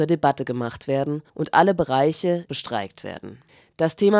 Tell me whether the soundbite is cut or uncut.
cut